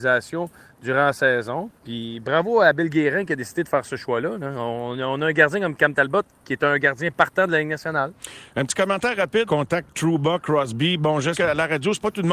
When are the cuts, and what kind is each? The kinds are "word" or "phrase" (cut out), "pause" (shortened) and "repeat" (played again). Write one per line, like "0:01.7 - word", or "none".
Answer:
0:01.8 - pause
0:09.5 - phrase
0:11.3 - word